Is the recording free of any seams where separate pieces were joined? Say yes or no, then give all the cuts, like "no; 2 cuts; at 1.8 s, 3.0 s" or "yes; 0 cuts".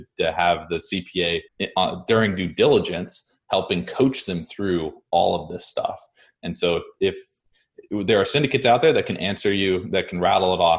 no; 1 cut; at 1.5 s